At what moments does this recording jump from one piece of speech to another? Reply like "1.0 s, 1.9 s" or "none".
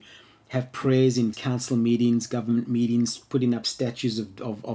1.3 s